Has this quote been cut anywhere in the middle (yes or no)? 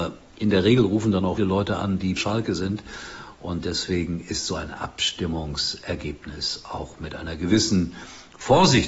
yes